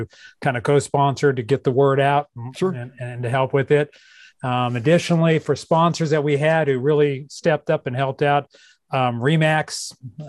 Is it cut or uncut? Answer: uncut